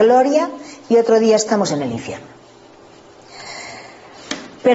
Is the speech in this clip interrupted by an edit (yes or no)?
no